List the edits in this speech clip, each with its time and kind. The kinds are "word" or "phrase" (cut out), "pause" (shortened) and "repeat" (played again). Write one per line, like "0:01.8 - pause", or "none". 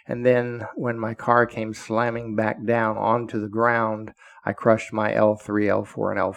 none